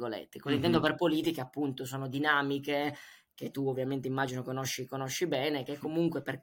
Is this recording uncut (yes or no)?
yes